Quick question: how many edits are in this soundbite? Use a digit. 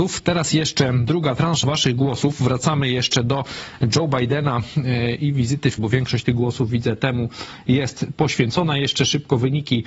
2